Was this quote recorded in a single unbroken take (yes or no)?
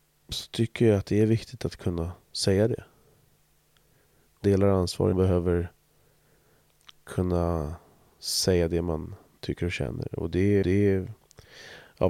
no